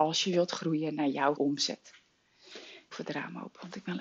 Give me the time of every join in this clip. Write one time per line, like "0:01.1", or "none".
0:01.4
0:02.9